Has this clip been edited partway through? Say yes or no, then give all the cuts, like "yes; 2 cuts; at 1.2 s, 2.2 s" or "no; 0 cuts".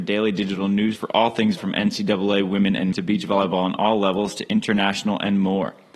yes; 3 cuts; at 1.0 s, 1.6 s, 2.9 s